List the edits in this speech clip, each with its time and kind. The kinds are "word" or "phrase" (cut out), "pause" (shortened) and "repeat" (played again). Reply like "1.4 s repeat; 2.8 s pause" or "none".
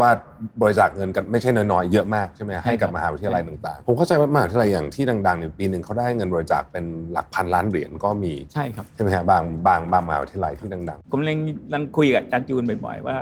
3.8 s word

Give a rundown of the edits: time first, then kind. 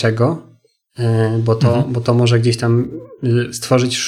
none

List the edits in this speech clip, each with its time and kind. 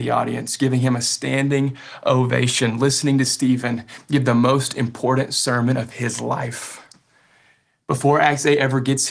none

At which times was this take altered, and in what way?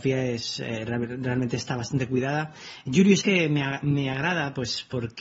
3.2 s phrase

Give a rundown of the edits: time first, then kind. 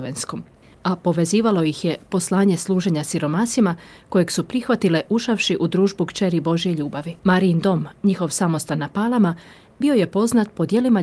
7.2 s pause

